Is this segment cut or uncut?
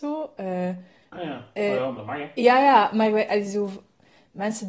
cut